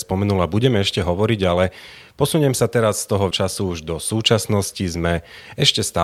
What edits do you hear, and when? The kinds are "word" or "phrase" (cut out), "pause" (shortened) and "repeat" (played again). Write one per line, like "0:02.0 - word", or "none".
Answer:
0:03.3 - word